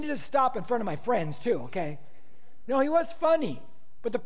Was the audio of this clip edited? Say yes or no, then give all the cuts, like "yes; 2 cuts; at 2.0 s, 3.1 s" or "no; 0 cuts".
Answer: no; 0 cuts